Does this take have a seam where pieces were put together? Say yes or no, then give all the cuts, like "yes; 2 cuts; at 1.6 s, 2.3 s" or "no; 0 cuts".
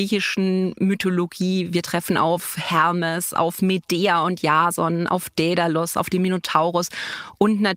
no; 0 cuts